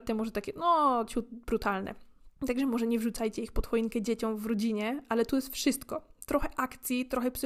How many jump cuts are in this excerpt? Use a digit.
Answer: 1